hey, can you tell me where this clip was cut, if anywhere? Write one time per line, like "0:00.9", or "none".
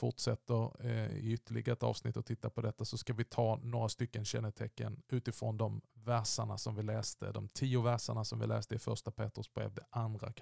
none